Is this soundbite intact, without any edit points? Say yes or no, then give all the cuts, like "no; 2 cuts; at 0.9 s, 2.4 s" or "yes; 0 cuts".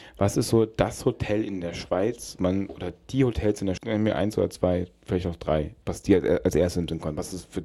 no; 3 cuts; at 2.4 s, 3.8 s, 5.8 s